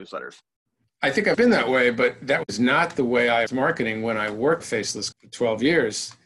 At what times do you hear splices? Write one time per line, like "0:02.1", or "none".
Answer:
0:01.3
0:03.5
0:04.6
0:05.1